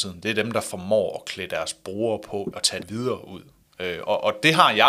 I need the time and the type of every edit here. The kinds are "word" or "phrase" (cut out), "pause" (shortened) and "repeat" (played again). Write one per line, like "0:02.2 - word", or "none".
0:02.5 - word
0:02.8 - phrase